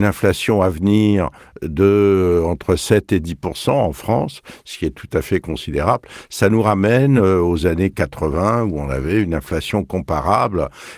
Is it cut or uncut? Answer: uncut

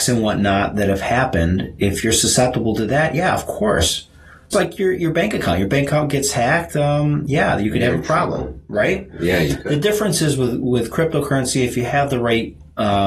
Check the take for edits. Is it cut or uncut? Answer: cut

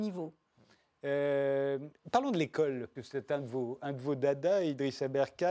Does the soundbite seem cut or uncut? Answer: cut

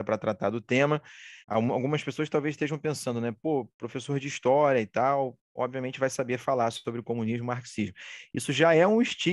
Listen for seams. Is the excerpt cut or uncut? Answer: cut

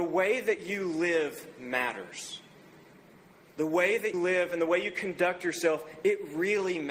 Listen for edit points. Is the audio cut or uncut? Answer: cut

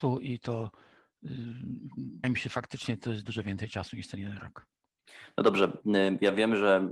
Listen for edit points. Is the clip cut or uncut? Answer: cut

